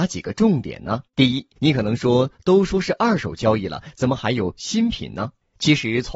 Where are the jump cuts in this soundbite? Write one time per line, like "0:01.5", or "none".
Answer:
0:01.1
0:01.6